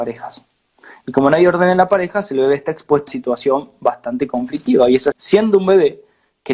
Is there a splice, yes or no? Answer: yes